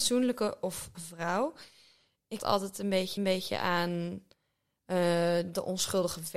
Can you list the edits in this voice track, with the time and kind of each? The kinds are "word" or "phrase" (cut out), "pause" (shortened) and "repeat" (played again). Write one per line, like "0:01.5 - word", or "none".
0:00.9 - word
0:02.4 - phrase
0:03.2 - repeat